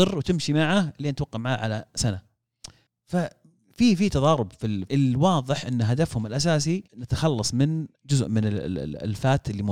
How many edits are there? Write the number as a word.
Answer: three